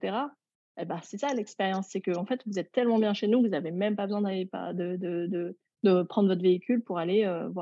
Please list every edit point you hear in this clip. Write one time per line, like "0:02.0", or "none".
none

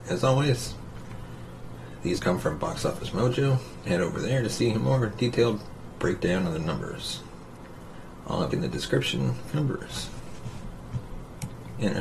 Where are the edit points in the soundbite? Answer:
0:02.2
0:03.9
0:08.5
0:09.5

